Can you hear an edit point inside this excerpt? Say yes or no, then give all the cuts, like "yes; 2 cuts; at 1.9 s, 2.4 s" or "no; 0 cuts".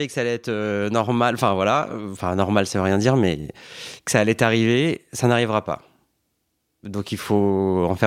no; 0 cuts